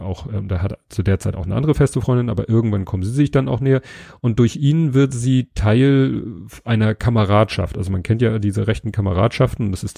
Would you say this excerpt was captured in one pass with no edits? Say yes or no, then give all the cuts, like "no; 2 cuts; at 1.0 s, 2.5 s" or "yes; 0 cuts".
yes; 0 cuts